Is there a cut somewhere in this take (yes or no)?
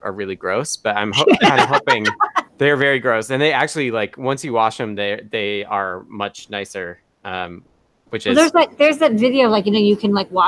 yes